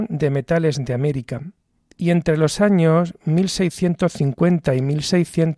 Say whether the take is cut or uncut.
uncut